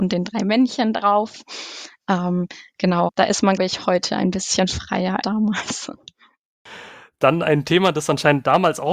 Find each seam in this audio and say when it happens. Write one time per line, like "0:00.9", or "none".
0:03.1
0:03.6
0:05.2